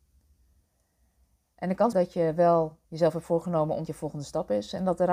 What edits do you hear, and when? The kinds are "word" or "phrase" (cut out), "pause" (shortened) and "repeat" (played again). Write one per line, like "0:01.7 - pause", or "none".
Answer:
0:01.9 - word
0:02.8 - pause
0:03.9 - phrase